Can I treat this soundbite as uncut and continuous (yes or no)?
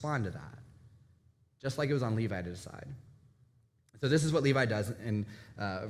yes